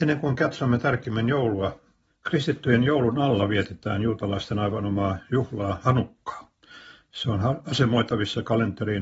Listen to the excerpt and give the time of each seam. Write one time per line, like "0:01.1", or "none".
none